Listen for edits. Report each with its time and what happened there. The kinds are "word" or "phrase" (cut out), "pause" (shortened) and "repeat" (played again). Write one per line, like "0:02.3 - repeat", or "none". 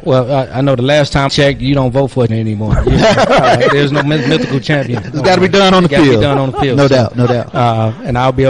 0:01.3 - word
0:02.3 - word
0:03.1 - word